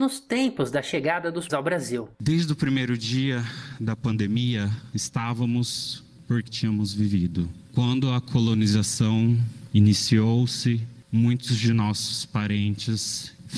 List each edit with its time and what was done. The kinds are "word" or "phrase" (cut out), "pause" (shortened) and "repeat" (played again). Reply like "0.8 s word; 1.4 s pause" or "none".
1.5 s word; 2.1 s pause; 4.9 s word; 6.5 s phrase